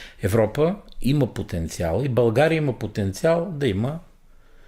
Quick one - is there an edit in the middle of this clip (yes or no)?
no